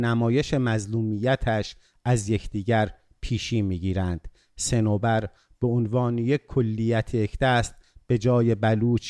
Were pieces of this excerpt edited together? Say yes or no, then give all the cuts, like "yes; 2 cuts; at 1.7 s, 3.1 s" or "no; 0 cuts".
no; 0 cuts